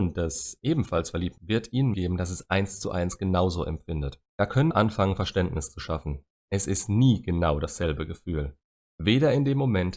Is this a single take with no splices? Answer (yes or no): no